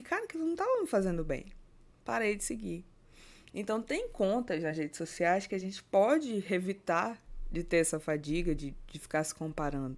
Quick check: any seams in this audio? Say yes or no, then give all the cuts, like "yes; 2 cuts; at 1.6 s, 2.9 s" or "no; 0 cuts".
no; 0 cuts